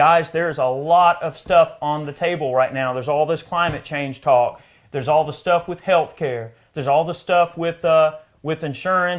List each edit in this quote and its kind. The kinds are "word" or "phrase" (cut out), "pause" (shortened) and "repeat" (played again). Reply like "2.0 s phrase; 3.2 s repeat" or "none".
none